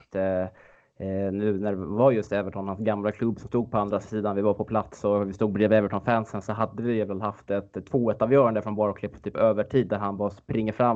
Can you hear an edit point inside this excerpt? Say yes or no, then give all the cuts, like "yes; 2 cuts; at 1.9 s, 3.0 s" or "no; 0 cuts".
no; 0 cuts